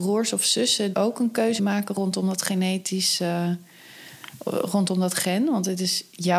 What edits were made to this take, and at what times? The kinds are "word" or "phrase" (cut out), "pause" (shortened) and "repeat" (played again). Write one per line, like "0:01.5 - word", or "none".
0:00.9 - word
0:01.6 - word